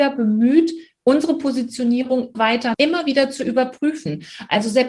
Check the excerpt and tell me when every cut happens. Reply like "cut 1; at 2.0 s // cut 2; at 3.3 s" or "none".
cut 1; at 2.3 s // cut 2; at 2.7 s